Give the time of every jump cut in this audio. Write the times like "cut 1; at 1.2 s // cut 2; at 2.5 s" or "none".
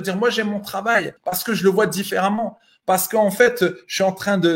cut 1; at 1.2 s

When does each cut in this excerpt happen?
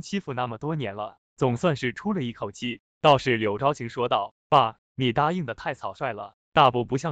cut 1; at 2.9 s

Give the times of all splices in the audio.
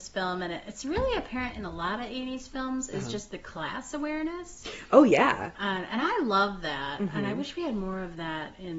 none

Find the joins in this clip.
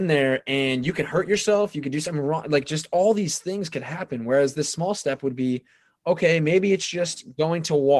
none

